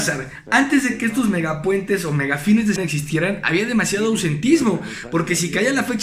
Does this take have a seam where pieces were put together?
yes; 1 cut; at 2.8 s

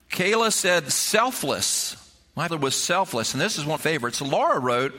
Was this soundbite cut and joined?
yes; 2 cuts; at 2.5 s, 3.8 s

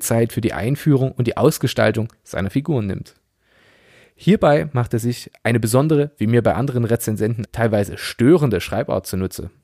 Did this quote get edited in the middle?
yes; 1 cut; at 7.5 s

